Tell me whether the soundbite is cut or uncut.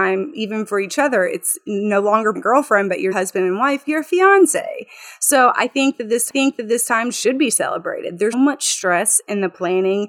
cut